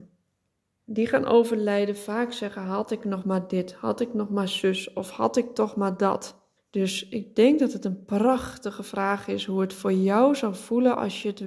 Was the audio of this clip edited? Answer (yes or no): yes